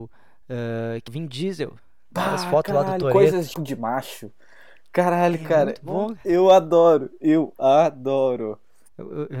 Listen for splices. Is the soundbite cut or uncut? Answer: cut